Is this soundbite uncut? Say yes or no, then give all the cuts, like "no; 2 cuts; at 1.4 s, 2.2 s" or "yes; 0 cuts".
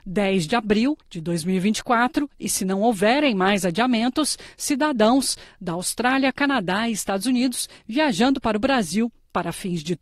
no; 1 cut; at 1.0 s